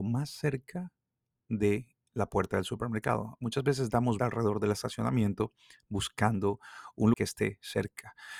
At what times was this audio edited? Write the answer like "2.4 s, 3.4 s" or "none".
4.2 s, 7.1 s